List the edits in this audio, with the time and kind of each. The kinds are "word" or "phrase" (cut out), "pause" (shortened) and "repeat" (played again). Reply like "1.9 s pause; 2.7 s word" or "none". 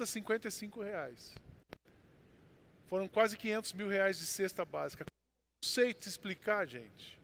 none